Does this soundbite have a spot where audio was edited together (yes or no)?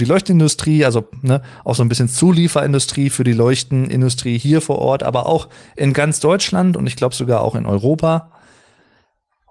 no